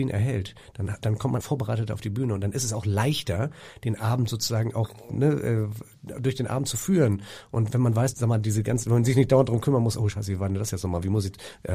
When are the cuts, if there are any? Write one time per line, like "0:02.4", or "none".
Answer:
0:01.4
0:07.7
0:08.1